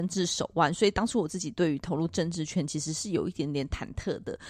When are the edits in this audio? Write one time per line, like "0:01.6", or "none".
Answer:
none